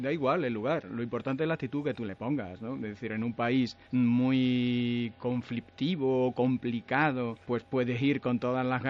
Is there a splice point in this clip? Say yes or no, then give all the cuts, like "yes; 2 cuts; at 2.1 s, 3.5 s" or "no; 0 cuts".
yes; 2 cuts; at 3.8 s, 7.4 s